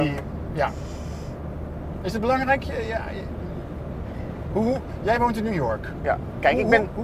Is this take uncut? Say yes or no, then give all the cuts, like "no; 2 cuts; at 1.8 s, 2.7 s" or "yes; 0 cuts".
yes; 0 cuts